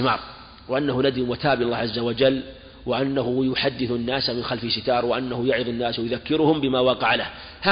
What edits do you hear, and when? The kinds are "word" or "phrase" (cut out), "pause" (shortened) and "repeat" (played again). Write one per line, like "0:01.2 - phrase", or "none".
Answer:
none